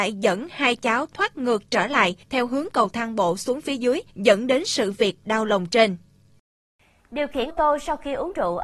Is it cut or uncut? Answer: cut